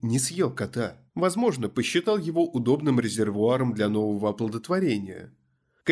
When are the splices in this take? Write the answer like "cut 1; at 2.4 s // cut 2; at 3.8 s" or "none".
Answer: cut 1; at 1.1 s